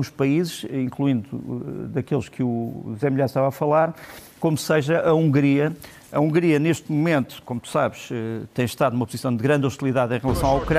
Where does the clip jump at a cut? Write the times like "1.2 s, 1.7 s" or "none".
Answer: none